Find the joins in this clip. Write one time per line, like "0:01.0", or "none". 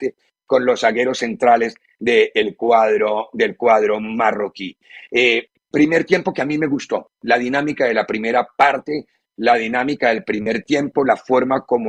none